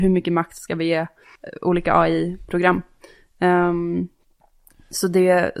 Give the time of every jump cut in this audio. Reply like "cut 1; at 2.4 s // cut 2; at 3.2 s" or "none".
none